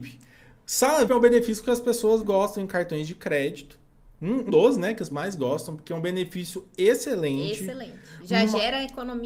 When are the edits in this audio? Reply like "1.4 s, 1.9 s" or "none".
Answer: 1.1 s, 2.2 s, 4.5 s, 5.1 s